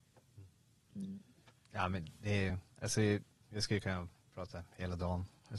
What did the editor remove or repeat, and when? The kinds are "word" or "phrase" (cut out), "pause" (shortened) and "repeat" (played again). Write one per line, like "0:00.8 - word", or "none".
none